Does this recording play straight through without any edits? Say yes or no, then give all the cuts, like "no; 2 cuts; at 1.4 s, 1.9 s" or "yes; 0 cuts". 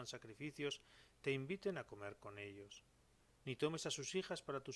yes; 0 cuts